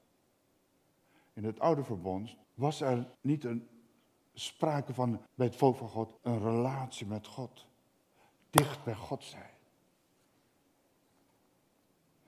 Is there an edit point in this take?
yes; 4 cuts; at 2.4 s, 3.1 s, 5.3 s, 6.2 s

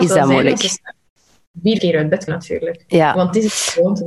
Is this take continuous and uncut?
no; 2 cuts; at 1.8 s, 2.3 s

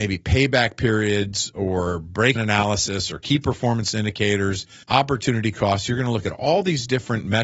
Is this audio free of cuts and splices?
no; 2 cuts; at 2.4 s, 4.8 s

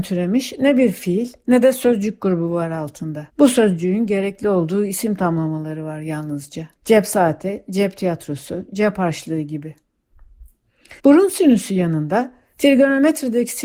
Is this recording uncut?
no; 3 cuts; at 3.3 s, 6.8 s, 11.0 s

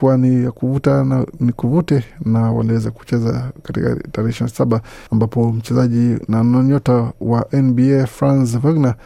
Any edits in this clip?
yes; 1 cut; at 5.1 s

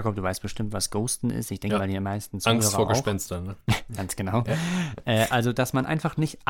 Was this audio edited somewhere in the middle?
no; 0 cuts

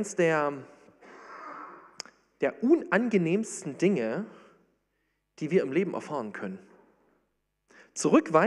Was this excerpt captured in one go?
yes; 0 cuts

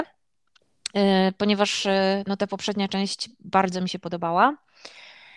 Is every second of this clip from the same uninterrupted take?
yes; 0 cuts

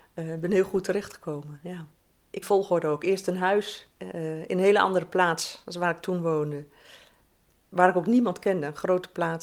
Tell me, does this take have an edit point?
yes; 2 cuts; at 2.4 s, 3.9 s

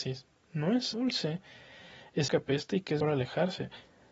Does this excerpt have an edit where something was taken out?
yes; 3 cuts; at 0.9 s, 2.3 s, 3.0 s

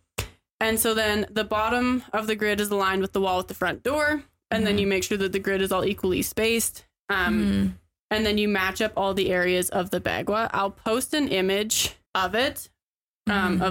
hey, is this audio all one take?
no; 1 cut; at 12.1 s

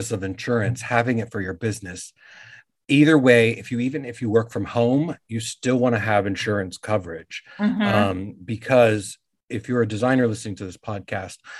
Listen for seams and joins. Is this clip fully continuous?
yes; 0 cuts

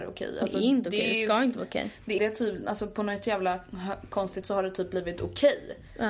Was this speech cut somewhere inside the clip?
yes; 2 cuts; at 2.2 s, 4.4 s

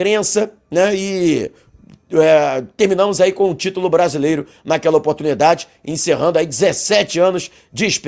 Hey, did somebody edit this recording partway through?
no; 0 cuts

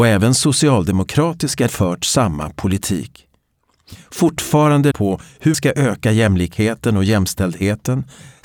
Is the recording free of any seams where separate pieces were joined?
no; 4 cuts; at 1.7 s, 4.9 s, 5.5 s, 6.0 s

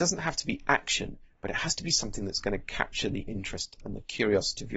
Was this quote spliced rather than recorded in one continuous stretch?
no; 0 cuts

